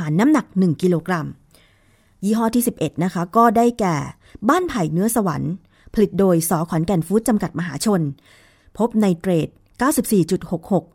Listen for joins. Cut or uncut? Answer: uncut